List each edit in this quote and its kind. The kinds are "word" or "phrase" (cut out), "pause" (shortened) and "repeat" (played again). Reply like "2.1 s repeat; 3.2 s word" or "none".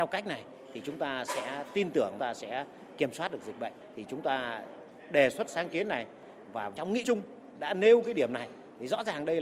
2.2 s phrase; 7.0 s word